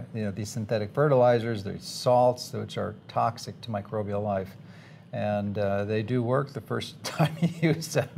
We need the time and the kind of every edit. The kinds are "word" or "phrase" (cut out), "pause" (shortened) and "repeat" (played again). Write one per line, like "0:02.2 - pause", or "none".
none